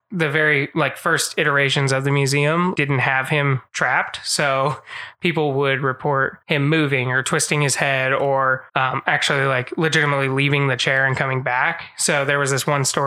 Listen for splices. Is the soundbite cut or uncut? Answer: cut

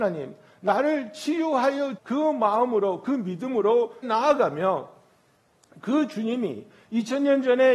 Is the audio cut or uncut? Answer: cut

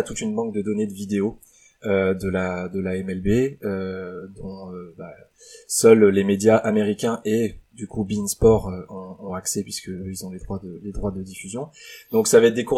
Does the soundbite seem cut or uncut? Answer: uncut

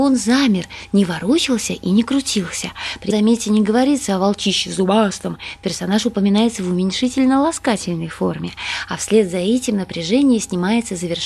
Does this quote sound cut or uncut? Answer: cut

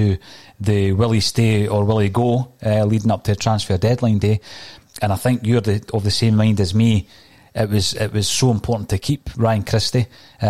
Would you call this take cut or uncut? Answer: uncut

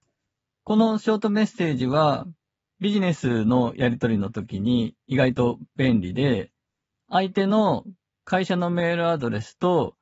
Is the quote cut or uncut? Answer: uncut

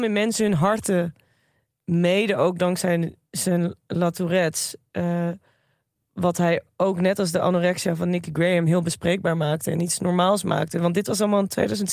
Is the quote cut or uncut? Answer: uncut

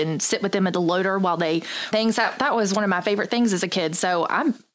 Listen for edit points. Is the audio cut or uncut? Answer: cut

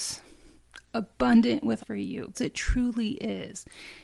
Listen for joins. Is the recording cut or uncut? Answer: cut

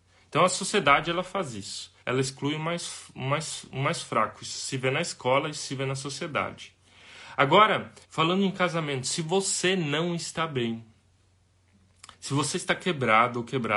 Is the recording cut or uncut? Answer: cut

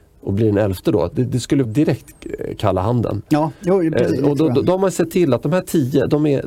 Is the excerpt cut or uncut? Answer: cut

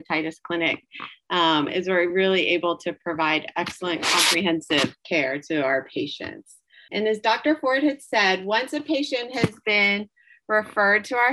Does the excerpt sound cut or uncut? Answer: uncut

